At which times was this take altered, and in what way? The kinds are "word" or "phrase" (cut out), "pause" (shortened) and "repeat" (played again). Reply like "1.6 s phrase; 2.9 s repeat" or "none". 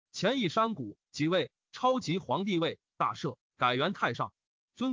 1.0 s pause